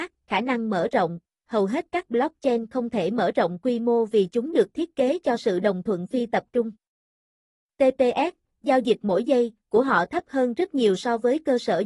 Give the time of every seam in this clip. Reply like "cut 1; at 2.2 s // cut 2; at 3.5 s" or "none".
none